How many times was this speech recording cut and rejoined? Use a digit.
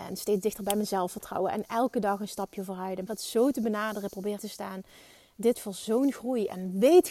3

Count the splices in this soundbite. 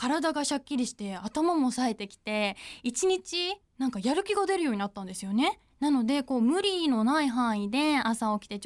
2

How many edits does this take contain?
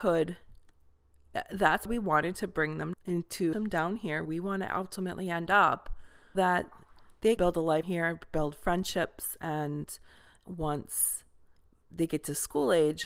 8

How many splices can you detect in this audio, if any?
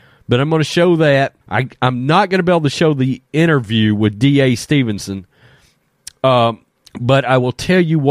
2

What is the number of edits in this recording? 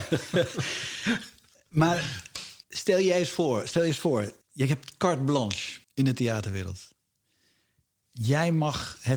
3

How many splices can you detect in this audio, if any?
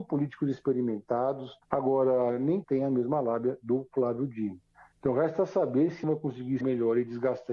4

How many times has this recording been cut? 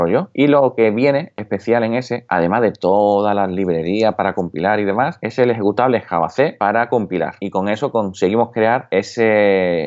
0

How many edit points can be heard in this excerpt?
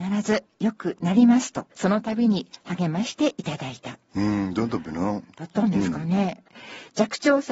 1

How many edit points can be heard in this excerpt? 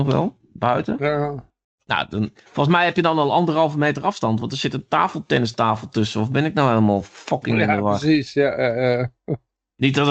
0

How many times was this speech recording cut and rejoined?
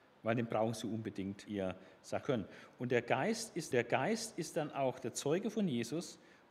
3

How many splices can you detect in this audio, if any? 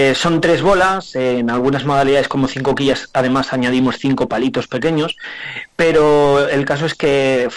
0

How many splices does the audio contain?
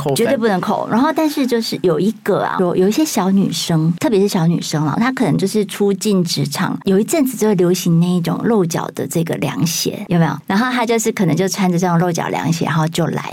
2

